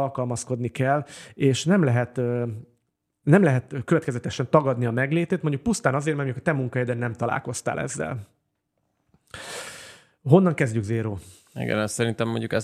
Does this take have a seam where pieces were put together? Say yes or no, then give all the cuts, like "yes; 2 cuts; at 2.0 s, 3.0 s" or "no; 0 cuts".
no; 0 cuts